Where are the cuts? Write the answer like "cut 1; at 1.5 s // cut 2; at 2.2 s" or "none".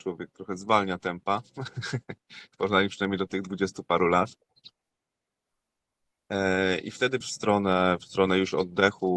cut 1; at 7.2 s